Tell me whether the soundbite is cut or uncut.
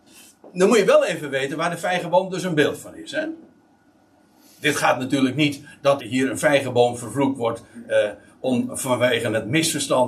cut